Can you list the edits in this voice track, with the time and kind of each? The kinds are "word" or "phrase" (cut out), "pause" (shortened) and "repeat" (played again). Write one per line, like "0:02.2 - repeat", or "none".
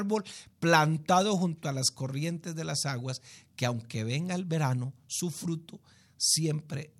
none